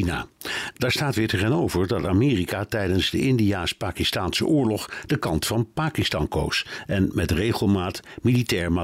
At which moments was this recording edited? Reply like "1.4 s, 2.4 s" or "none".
none